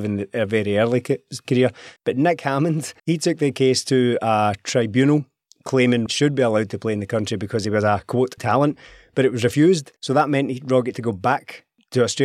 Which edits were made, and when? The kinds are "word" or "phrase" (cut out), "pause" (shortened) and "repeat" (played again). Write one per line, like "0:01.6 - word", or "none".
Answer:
0:01.4 - phrase
0:02.0 - pause
0:03.0 - pause
0:06.1 - word
0:08.4 - word
0:10.0 - pause
0:10.9 - word